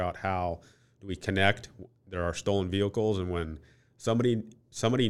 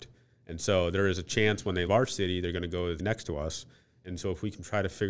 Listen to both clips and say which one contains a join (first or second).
second